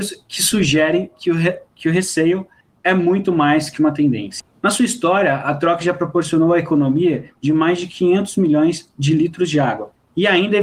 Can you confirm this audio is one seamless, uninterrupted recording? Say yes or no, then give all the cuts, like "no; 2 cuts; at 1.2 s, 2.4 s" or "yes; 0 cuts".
yes; 0 cuts